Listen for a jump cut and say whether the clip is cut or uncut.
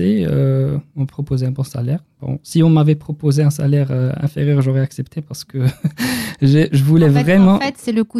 uncut